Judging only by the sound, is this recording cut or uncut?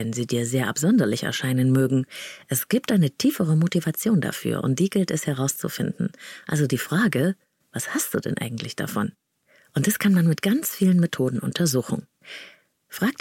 uncut